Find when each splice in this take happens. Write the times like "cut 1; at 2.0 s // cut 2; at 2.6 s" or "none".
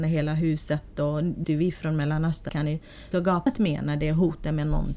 cut 1; at 1.4 s // cut 2; at 2.5 s // cut 3; at 3.1 s // cut 4; at 3.5 s